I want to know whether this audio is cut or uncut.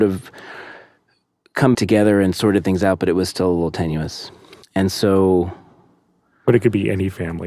cut